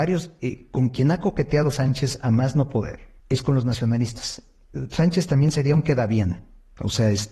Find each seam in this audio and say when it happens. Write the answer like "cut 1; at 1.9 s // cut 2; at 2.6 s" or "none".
cut 1; at 3.2 s